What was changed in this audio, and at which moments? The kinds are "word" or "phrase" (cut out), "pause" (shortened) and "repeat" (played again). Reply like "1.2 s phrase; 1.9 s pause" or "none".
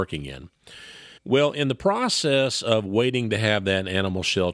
1.2 s pause